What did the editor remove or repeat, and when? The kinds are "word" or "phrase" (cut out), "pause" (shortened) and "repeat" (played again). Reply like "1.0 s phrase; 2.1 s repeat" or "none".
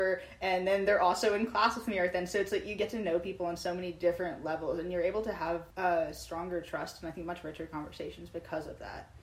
5.7 s pause